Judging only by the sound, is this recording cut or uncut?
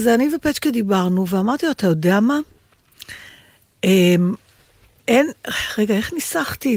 uncut